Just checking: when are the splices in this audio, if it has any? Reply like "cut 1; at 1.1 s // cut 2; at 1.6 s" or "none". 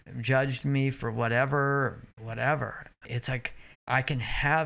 cut 1; at 2.1 s // cut 2; at 3.0 s // cut 3; at 3.7 s